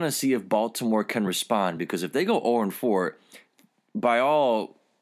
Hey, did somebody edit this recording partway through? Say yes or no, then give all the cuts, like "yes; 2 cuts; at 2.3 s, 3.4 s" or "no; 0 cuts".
no; 0 cuts